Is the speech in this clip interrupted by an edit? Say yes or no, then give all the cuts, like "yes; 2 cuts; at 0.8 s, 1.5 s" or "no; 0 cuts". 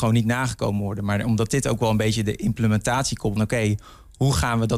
yes; 1 cut; at 3.4 s